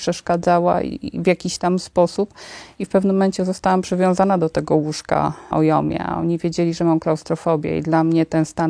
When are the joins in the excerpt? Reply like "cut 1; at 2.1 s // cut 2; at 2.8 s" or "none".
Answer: cut 1; at 5.5 s